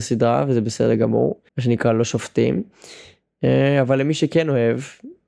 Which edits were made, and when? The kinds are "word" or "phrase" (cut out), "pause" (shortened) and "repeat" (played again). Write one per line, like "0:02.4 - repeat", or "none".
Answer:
0:01.5 - pause